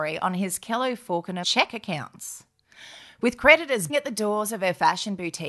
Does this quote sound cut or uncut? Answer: cut